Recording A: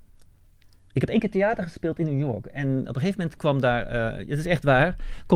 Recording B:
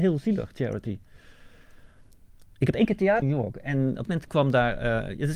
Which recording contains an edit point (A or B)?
B